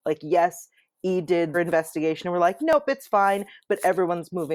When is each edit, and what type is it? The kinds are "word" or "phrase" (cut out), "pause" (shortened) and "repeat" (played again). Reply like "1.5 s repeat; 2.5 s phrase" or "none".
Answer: 1.5 s word